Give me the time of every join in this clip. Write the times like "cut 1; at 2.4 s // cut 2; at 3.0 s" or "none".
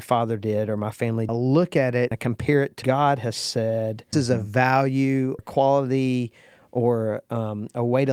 cut 1; at 1.3 s // cut 2; at 2.1 s // cut 3; at 2.8 s // cut 4; at 4.1 s // cut 5; at 5.4 s